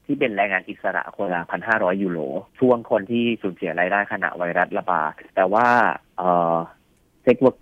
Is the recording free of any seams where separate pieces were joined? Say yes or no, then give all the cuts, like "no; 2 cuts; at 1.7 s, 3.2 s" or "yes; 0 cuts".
no; 2 cuts; at 2.5 s, 5.3 s